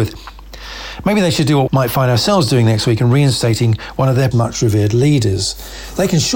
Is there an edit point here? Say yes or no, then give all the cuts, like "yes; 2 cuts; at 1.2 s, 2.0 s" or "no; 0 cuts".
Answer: yes; 2 cuts; at 1.7 s, 4.3 s